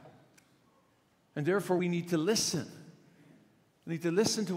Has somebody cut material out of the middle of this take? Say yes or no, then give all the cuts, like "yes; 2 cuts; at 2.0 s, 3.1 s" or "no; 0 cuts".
yes; 1 cut; at 1.8 s